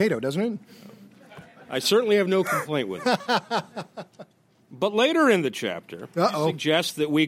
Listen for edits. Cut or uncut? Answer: uncut